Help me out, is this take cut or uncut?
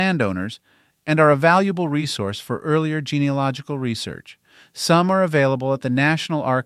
uncut